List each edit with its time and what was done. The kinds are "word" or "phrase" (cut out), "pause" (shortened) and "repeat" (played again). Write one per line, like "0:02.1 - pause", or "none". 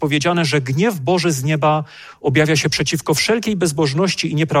none